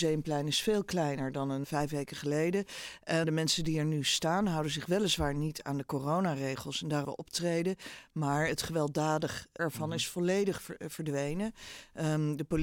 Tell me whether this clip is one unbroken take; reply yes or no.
no